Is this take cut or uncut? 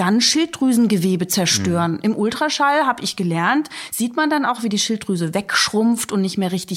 uncut